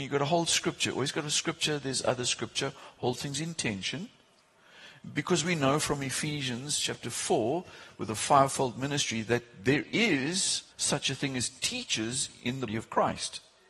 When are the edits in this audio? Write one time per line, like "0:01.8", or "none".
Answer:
0:10.7
0:12.7

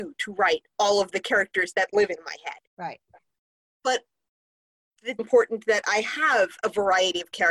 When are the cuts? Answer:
0:02.7
0:05.2

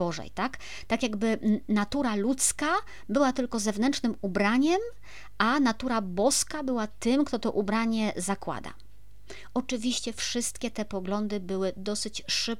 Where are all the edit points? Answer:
none

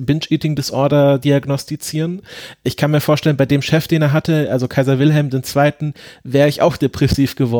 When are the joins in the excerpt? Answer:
none

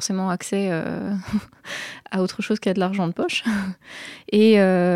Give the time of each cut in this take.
none

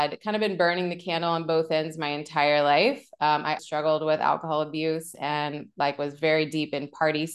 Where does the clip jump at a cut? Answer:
0:03.6

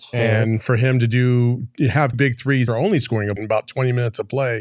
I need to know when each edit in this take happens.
0:02.1
0:02.7
0:03.4

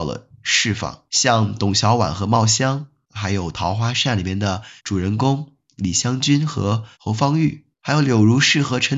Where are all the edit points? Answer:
0:01.1
0:04.8
0:06.9
0:07.7

